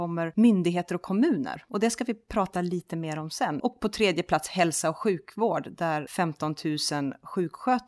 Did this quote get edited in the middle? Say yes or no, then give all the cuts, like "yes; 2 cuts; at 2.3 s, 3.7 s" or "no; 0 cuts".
no; 0 cuts